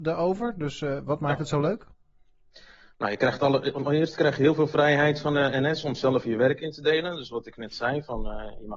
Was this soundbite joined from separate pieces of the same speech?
no; 0 cuts

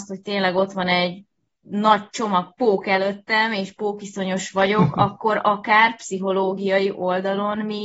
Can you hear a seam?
no; 0 cuts

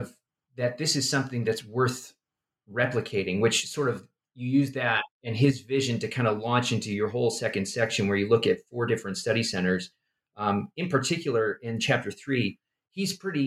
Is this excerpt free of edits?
yes; 0 cuts

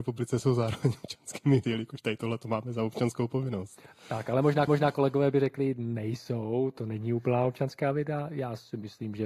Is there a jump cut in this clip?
yes; 2 cuts; at 1.6 s, 4.7 s

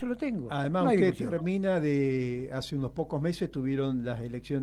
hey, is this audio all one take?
yes; 0 cuts

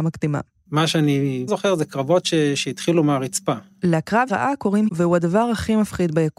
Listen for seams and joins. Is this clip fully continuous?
no; 3 cuts; at 1.5 s, 4.3 s, 4.9 s

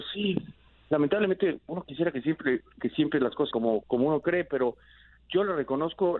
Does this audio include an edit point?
yes; 3 cuts; at 2.8 s, 3.5 s, 3.8 s

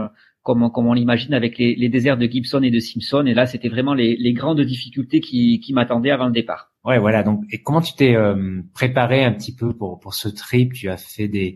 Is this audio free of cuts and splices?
no; 1 cut; at 6.8 s

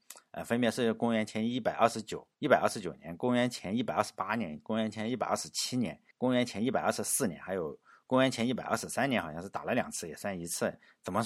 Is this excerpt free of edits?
no; 2 cuts; at 2.3 s, 6.1 s

